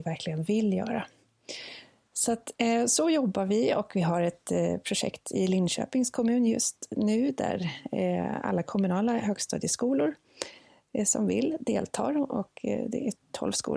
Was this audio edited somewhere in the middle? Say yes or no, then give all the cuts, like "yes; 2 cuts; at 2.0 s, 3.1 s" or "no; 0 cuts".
no; 0 cuts